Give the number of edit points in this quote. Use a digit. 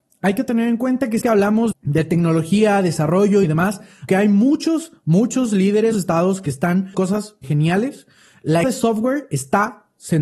8